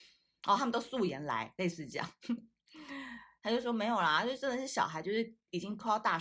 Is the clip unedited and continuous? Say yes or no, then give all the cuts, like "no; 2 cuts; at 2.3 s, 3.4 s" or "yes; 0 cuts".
yes; 0 cuts